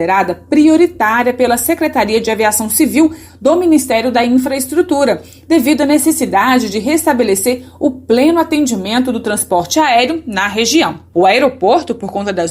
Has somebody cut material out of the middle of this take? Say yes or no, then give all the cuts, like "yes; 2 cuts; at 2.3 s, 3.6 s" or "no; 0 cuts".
no; 0 cuts